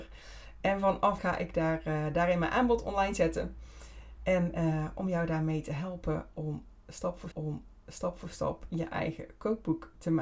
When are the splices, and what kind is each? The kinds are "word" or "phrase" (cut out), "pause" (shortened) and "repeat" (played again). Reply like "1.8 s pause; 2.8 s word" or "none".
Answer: 1.2 s word; 7.3 s repeat